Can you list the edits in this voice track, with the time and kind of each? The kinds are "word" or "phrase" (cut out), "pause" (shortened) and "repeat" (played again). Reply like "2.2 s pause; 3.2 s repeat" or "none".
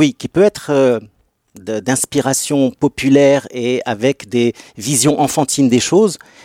none